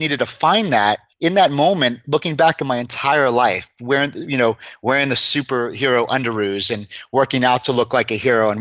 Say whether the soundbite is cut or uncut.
cut